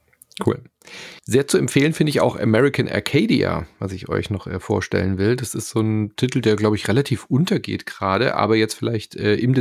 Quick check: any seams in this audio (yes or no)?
yes